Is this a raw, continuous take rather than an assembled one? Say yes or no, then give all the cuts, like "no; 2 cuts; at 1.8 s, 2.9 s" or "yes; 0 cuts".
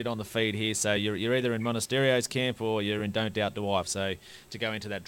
yes; 0 cuts